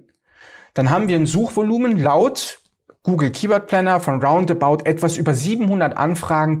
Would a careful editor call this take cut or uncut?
uncut